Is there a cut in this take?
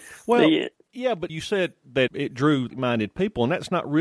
yes; 3 cuts; at 1.3 s, 2.1 s, 2.7 s

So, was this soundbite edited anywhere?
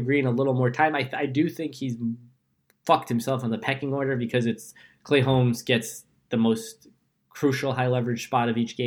no; 0 cuts

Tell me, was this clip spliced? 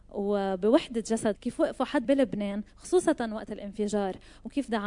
yes; 3 cuts; at 1.3 s, 2.0 s, 2.7 s

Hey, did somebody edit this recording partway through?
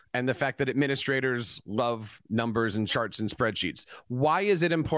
no; 0 cuts

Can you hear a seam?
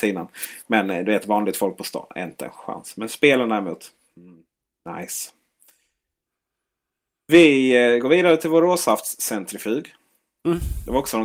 no; 0 cuts

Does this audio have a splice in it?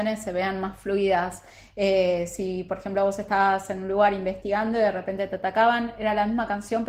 no; 0 cuts

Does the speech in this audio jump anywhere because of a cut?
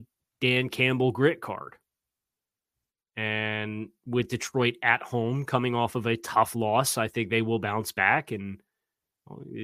no; 0 cuts

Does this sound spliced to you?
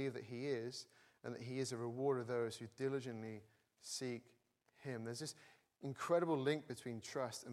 no; 0 cuts

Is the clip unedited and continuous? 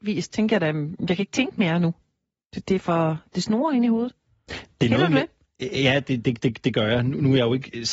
yes; 0 cuts

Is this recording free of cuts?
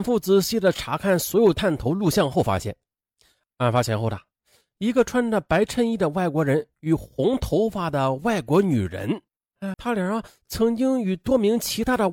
no; 1 cut; at 9.7 s

